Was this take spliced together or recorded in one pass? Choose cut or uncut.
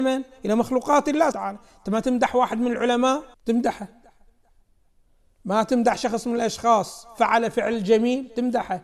cut